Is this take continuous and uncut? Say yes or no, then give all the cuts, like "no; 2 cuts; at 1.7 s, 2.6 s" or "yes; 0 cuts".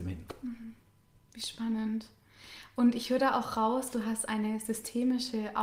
yes; 0 cuts